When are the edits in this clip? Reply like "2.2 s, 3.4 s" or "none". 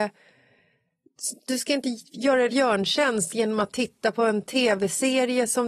2.5 s